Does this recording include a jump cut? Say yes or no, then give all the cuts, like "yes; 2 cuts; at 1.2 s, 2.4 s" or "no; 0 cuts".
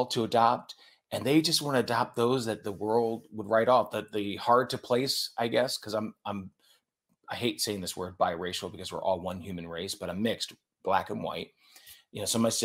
no; 0 cuts